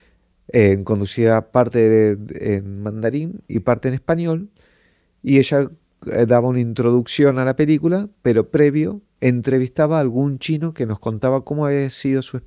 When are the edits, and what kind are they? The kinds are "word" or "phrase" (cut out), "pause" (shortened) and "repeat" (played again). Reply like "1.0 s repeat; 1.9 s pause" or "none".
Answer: none